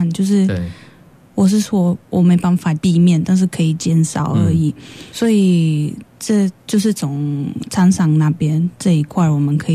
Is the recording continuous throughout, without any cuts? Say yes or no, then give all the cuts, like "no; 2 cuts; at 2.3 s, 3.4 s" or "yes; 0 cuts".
yes; 0 cuts